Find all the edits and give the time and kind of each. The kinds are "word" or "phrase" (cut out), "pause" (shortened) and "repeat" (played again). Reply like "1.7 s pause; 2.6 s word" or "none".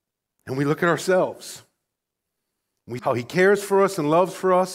3.0 s word